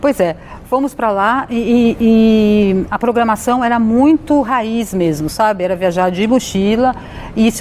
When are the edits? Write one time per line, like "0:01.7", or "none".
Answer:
none